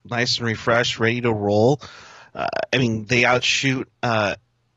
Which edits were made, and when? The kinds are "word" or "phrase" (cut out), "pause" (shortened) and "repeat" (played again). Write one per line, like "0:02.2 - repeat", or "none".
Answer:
none